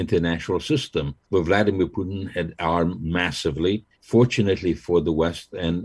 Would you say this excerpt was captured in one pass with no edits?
no; 2 cuts; at 1.2 s, 3.9 s

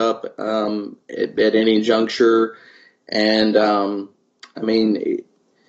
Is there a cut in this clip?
no; 0 cuts

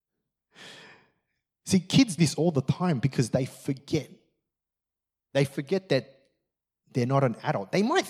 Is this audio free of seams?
no; 1 cut; at 2.2 s

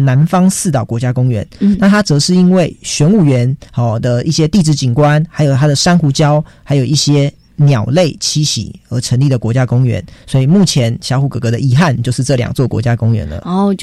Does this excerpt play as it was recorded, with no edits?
no; 1 cut; at 3.7 s

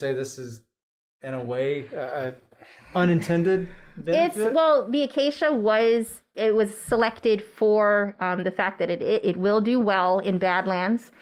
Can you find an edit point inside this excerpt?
no; 0 cuts

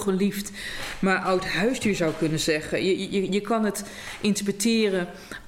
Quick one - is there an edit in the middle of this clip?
no; 0 cuts

